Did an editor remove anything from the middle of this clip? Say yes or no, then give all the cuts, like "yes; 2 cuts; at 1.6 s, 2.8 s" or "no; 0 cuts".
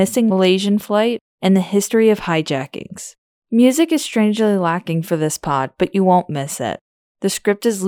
no; 0 cuts